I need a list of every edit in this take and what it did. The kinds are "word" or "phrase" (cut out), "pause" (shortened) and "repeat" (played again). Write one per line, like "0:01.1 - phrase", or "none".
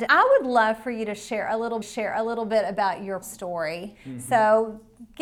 0:01.8 - repeat
0:03.2 - word